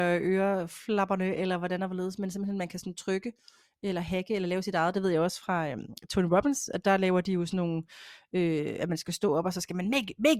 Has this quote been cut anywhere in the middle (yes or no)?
no